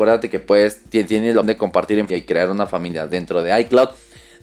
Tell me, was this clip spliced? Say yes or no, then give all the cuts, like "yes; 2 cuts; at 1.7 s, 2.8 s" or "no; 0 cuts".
yes; 2 cuts; at 1.4 s, 2.1 s